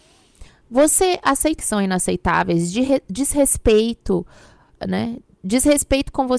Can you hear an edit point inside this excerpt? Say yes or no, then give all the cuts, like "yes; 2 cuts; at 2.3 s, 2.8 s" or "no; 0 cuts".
yes; 1 cut; at 1.6 s